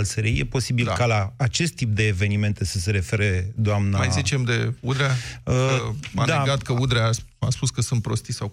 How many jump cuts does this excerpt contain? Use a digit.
0